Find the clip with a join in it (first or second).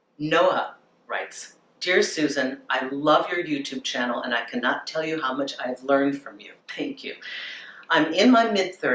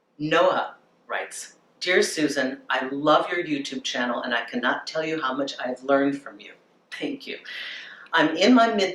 first